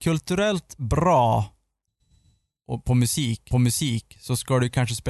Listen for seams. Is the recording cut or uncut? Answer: cut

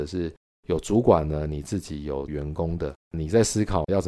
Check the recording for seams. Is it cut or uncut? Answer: cut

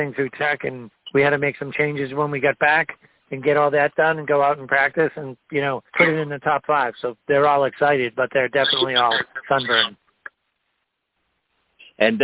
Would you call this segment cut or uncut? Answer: cut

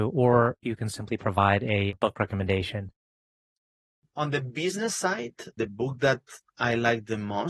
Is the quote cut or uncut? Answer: uncut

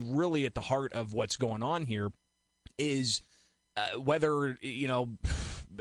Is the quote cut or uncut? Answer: uncut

